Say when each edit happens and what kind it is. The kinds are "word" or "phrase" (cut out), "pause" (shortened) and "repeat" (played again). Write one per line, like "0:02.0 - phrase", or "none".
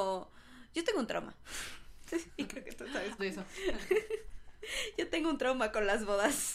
0:03.2 - word